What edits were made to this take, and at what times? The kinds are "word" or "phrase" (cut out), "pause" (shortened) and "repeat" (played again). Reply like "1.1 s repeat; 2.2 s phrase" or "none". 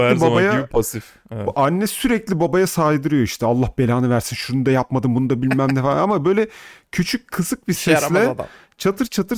none